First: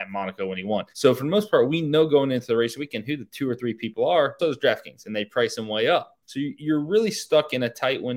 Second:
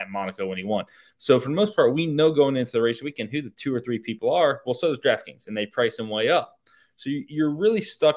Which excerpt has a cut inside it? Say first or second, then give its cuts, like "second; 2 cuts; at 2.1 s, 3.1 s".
first; 3 cuts; at 0.9 s, 4.4 s, 6.2 s